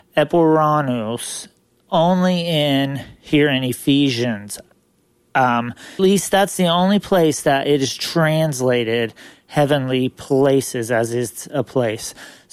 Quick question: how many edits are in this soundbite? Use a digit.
1